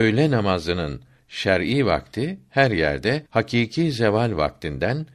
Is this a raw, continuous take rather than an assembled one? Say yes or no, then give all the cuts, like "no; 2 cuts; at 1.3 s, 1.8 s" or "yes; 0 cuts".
no; 1 cut; at 3.3 s